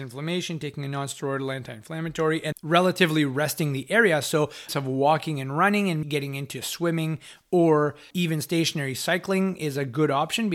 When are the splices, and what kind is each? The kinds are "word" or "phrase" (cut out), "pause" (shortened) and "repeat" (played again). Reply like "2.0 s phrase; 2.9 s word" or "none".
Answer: 2.5 s word; 4.7 s word; 6.0 s word; 8.1 s word

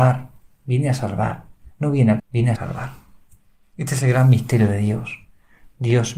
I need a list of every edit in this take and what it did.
1.7 s pause; 2.2 s word; 2.6 s phrase

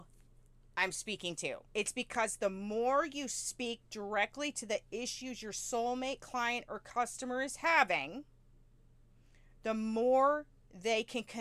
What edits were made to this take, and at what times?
1.7 s pause

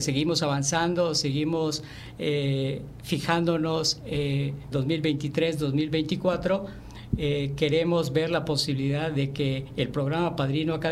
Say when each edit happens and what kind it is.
4.7 s phrase

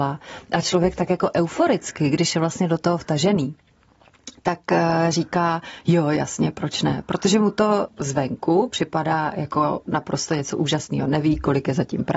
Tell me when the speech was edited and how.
none

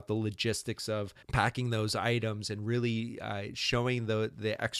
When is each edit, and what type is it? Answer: 1.2 s pause

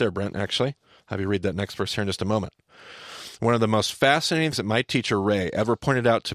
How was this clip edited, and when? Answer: 4.5 s word

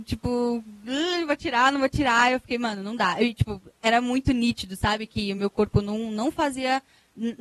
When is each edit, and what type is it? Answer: none

